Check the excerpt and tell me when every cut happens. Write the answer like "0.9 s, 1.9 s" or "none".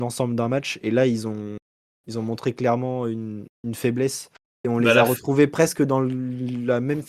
none